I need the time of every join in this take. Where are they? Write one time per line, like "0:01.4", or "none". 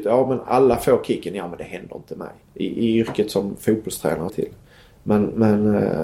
0:02.4
0:04.3